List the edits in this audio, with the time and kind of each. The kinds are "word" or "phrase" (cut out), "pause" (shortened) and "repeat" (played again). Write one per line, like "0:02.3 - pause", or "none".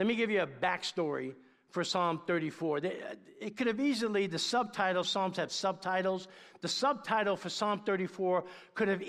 0:05.0 - word